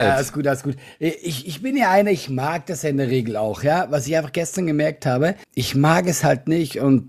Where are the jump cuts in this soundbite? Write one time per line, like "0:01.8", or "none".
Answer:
0:05.4

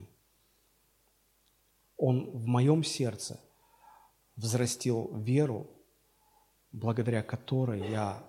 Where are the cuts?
none

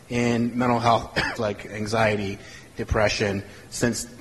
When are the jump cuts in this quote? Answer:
0:01.4

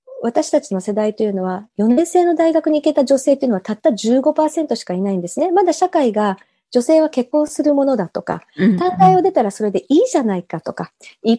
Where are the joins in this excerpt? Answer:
none

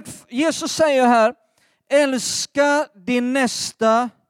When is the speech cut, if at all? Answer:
none

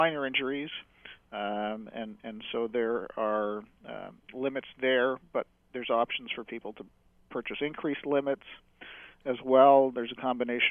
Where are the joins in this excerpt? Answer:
none

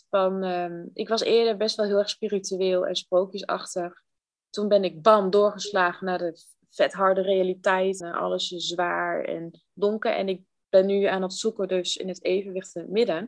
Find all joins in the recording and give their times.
0:08.0

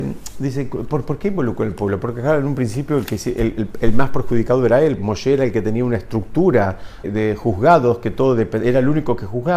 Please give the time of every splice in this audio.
0:05.0
0:07.0

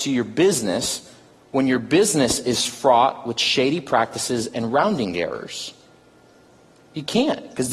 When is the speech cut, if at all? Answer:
none

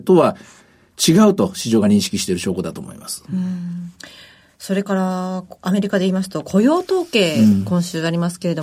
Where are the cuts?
none

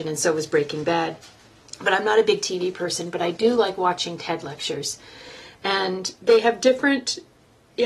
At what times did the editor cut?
none

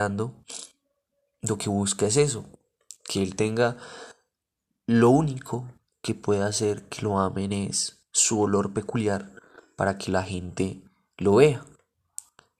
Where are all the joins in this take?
none

